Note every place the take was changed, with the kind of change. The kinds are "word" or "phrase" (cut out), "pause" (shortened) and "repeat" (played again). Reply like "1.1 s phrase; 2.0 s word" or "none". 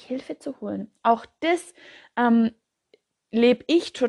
none